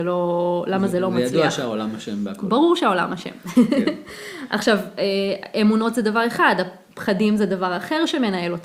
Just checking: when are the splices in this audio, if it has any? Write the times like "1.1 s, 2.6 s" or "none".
none